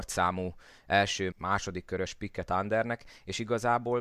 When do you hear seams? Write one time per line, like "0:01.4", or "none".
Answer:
0:01.3
0:02.5